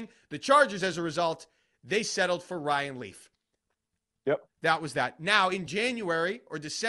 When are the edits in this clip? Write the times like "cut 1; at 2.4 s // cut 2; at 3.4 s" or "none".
none